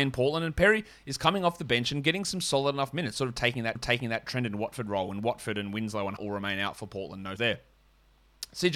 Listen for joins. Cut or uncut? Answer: cut